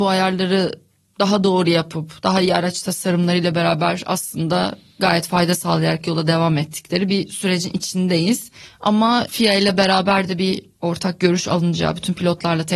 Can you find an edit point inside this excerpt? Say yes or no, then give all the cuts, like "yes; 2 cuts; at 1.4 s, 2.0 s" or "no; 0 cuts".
no; 0 cuts